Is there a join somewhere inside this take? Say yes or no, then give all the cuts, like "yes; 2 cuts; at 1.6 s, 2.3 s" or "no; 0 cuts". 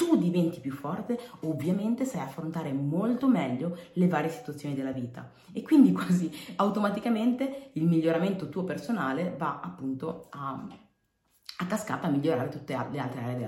no; 0 cuts